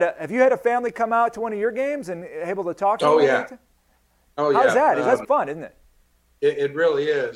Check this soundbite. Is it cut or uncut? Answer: cut